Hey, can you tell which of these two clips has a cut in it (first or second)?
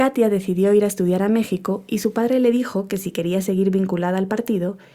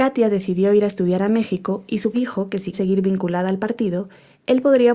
second